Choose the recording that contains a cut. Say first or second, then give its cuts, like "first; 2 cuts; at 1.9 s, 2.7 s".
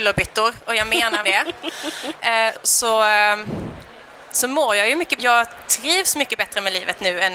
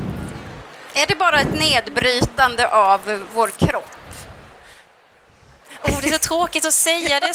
first; 3 cuts; at 1.2 s, 2.6 s, 5.2 s